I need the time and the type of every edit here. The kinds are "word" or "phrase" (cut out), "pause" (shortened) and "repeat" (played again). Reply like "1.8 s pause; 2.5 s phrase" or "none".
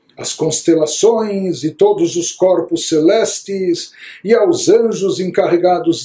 none